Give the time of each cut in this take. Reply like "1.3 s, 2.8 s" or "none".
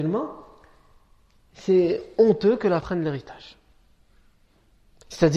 2.8 s